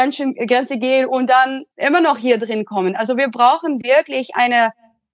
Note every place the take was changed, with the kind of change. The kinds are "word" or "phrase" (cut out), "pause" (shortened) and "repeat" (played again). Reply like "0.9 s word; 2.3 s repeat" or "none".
1.7 s pause